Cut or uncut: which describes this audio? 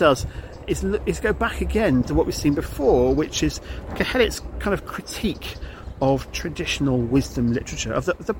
cut